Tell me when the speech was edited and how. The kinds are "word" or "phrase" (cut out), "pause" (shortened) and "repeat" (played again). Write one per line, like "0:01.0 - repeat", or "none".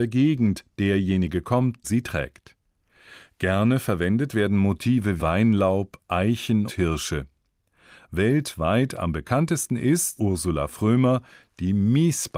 0:01.8 - word
0:05.2 - word
0:06.7 - word
0:10.2 - word